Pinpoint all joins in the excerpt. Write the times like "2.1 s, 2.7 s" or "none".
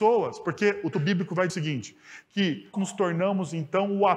0.9 s, 1.5 s, 2.7 s